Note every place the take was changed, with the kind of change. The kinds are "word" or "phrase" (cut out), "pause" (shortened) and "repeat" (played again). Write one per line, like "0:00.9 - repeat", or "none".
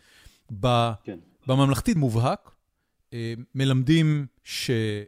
0:02.0 - phrase